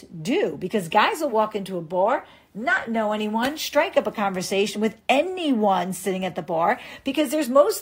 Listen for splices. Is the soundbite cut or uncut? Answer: uncut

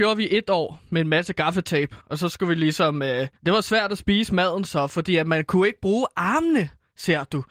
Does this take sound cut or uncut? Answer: cut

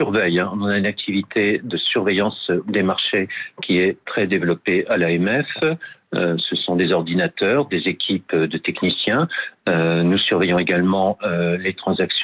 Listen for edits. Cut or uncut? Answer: uncut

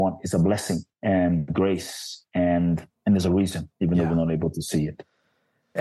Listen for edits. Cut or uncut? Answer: cut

